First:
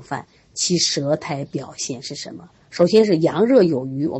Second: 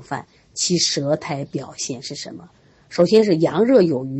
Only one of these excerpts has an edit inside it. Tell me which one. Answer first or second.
first